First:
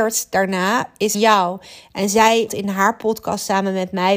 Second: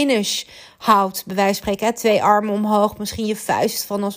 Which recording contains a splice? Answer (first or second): first